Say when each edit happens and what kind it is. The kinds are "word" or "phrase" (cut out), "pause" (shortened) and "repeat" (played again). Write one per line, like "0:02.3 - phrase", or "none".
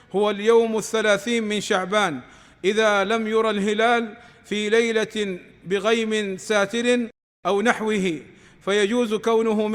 none